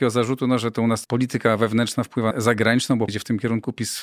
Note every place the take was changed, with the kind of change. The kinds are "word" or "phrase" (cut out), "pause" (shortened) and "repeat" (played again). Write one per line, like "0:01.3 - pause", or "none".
0:01.0 - word
0:02.3 - phrase
0:03.1 - word